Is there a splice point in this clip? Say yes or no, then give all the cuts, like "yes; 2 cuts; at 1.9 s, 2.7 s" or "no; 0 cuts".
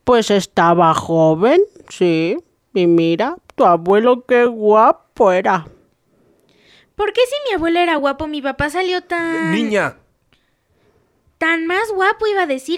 no; 0 cuts